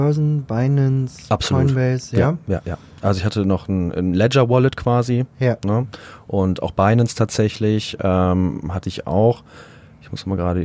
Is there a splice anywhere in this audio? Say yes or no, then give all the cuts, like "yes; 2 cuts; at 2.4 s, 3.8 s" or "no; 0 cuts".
no; 0 cuts